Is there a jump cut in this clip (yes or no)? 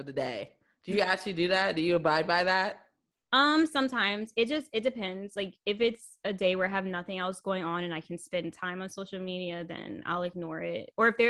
no